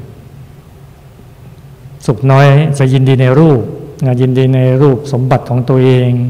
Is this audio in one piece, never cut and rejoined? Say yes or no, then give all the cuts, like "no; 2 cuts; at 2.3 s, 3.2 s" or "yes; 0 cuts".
no; 1 cut; at 2.8 s